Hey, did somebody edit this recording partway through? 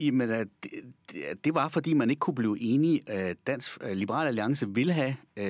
no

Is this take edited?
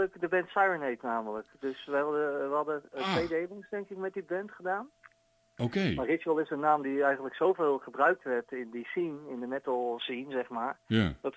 no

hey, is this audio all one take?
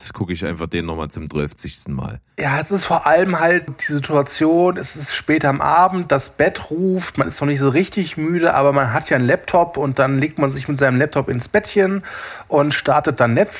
no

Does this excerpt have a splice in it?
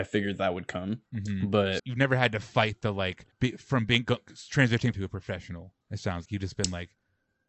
yes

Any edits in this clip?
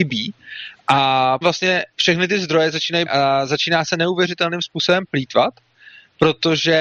yes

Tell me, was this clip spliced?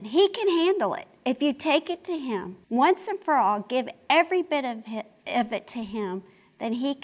yes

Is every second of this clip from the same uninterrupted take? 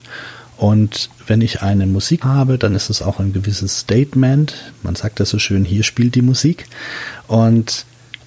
no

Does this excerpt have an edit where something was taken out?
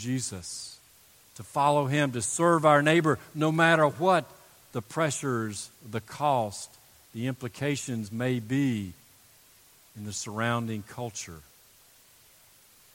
no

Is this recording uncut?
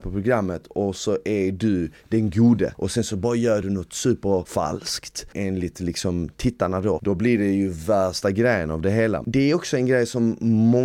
yes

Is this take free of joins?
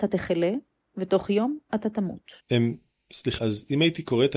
no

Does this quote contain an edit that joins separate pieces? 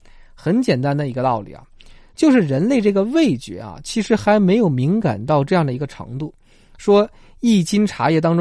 no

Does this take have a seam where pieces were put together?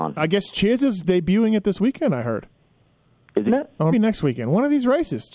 yes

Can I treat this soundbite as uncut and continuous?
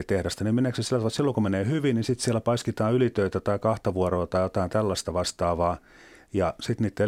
yes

